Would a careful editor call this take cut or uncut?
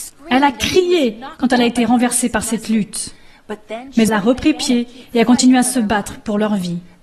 cut